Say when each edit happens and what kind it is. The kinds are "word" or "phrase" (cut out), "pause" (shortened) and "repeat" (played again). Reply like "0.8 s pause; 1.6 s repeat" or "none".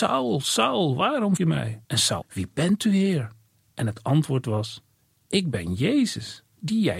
1.4 s word; 1.8 s pause; 2.2 s word; 3.5 s pause